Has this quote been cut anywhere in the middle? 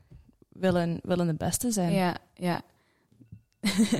no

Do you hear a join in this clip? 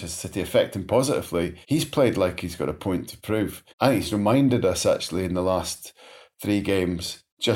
yes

